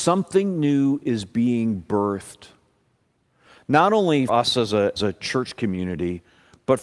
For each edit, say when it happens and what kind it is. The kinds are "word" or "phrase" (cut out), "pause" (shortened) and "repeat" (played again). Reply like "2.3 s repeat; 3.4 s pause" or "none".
4.3 s word; 5.0 s word